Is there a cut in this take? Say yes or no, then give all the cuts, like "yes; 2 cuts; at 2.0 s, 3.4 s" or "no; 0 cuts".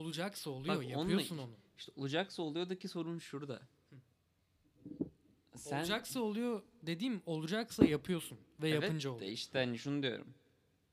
no; 0 cuts